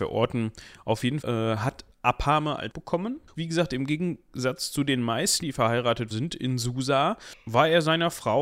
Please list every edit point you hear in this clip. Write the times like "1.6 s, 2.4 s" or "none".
1.2 s, 1.9 s, 2.7 s, 3.4 s, 5.4 s, 6.1 s